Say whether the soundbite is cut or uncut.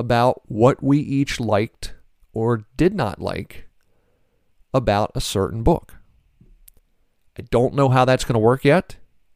uncut